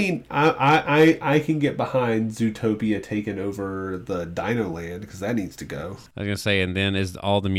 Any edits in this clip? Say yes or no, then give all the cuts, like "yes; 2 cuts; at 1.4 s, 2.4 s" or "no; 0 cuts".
no; 0 cuts